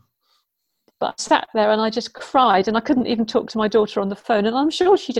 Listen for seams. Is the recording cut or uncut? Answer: uncut